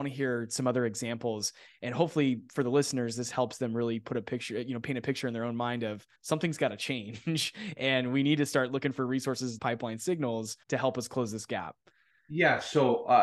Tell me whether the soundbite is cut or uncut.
cut